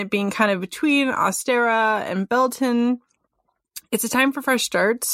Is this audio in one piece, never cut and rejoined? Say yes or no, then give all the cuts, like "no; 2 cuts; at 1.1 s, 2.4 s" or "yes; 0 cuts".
yes; 0 cuts